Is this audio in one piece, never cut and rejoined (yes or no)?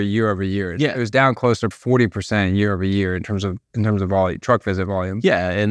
no